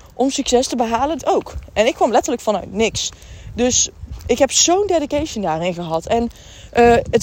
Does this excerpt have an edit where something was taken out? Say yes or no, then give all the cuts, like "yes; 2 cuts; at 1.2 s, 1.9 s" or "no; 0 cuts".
yes; 1 cut; at 1.2 s